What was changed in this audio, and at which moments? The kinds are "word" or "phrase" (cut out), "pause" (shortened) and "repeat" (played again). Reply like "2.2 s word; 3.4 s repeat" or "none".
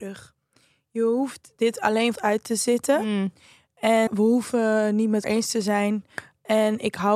2.1 s word; 4.1 s word; 5.2 s word